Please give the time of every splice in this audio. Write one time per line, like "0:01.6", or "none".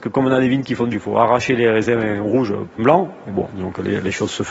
0:00.9
0:02.8